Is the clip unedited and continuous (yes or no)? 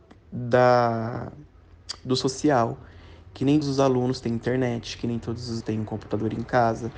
no